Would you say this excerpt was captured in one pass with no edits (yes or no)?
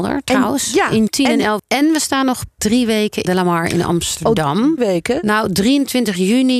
no